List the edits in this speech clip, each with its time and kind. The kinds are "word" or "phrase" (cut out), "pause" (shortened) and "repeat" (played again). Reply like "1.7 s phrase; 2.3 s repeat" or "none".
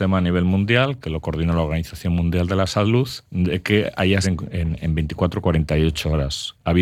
3.2 s pause; 4.2 s phrase